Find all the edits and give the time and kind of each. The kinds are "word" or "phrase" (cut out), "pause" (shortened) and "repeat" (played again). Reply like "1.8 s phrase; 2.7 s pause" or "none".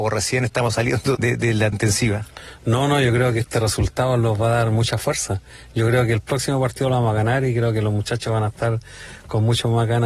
1.1 s word; 1.7 s word